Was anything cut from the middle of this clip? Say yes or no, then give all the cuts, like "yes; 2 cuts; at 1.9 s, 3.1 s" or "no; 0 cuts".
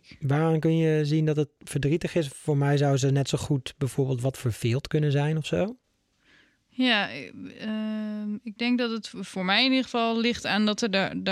no; 0 cuts